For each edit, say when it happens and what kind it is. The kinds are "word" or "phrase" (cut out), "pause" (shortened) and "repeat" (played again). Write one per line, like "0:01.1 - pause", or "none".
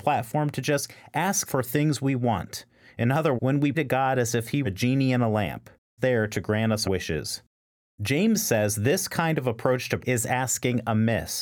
0:01.5 - word
0:03.4 - word
0:03.7 - word
0:04.6 - word
0:06.0 - word
0:06.8 - word
0:10.0 - word